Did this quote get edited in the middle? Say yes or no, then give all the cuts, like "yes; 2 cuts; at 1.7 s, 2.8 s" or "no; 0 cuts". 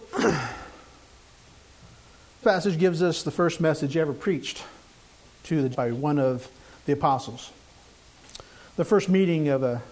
yes; 2 cuts; at 2.4 s, 5.7 s